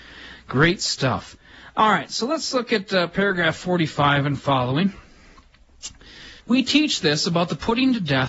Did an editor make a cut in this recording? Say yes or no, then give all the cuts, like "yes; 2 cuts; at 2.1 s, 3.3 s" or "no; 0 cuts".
yes; 1 cut; at 6.4 s